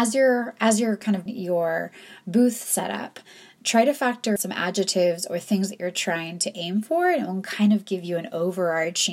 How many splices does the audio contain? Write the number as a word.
two